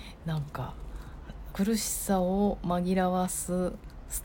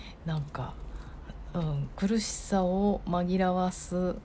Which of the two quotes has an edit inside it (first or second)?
first